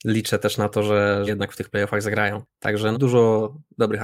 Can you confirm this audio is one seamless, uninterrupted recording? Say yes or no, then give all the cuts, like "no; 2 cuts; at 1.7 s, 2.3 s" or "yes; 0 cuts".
no; 2 cuts; at 1.3 s, 2.9 s